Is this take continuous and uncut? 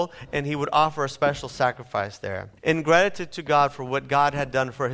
no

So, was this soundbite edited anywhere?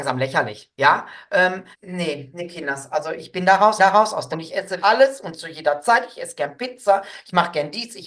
yes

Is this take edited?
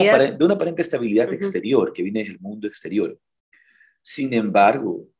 no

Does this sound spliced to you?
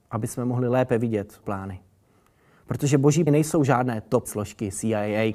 yes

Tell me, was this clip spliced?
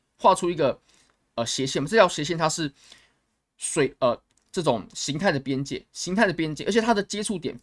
no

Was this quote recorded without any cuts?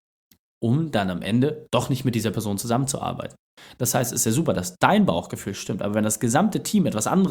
yes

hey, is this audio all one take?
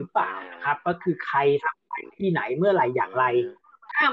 yes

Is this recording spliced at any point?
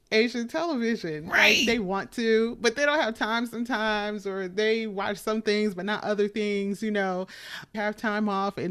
yes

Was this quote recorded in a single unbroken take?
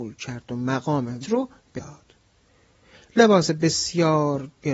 no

